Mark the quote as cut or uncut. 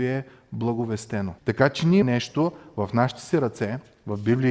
cut